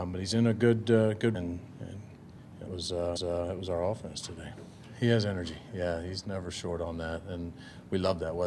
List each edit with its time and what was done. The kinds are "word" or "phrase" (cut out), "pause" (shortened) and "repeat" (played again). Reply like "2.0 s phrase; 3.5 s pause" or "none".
1.3 s word; 2.7 s word; 3.2 s repeat; 6.2 s word